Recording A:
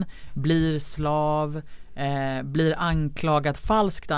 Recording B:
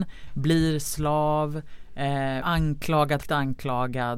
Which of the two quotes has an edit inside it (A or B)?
B